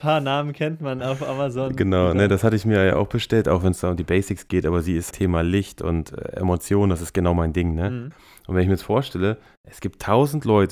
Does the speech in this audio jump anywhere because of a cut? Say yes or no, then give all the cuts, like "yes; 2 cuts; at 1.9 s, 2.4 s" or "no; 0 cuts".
yes; 1 cut; at 5.1 s